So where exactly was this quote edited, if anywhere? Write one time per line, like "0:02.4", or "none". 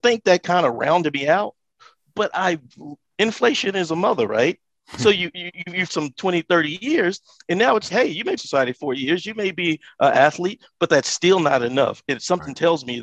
0:05.9
0:07.9
0:08.4